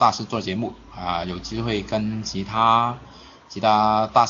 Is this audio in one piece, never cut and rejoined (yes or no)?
yes